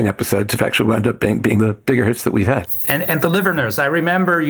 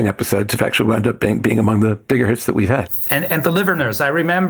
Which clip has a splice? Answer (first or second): first